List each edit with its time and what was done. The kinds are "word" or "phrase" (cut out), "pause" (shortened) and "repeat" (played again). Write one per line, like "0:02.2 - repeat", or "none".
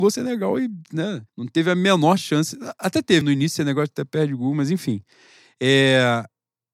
0:01.3 - pause
0:03.2 - word